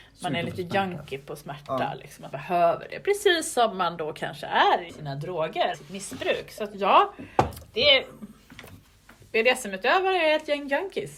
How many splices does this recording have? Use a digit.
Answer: 3